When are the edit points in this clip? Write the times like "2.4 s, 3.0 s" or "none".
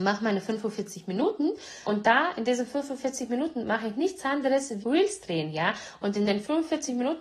1.8 s, 4.8 s